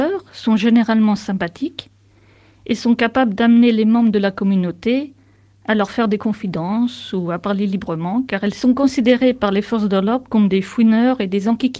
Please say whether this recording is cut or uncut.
uncut